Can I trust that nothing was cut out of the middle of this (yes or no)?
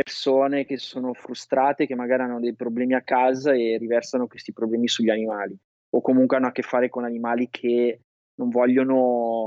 yes